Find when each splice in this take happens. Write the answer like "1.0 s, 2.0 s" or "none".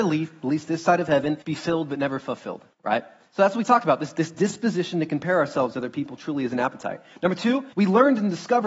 1.4 s, 2.7 s, 7.7 s